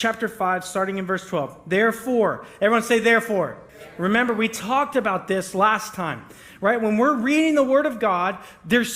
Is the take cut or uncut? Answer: cut